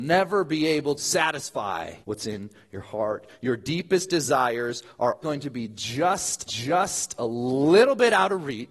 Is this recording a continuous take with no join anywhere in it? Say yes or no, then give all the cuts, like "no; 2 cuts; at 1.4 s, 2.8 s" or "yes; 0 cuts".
no; 4 cuts; at 1.0 s, 2.0 s, 5.2 s, 6.5 s